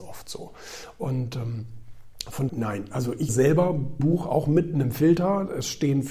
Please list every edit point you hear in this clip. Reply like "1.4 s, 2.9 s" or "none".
2.5 s, 3.3 s, 4.0 s